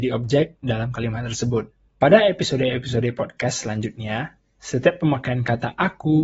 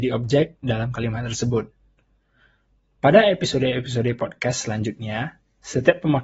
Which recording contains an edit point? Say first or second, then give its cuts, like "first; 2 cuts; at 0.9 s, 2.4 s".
first; 1 cut; at 1.9 s